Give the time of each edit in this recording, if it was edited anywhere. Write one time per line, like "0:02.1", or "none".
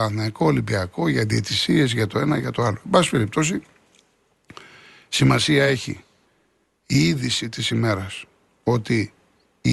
none